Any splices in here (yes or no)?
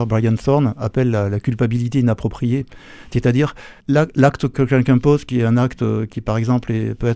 yes